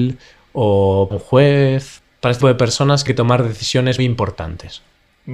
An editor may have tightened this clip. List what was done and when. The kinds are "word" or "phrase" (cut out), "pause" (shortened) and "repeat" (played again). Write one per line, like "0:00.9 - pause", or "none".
0:01.1 - word
0:02.4 - word
0:03.1 - word
0:04.0 - word